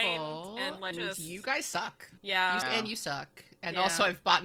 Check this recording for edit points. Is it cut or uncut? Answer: cut